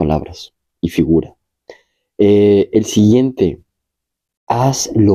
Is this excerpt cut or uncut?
uncut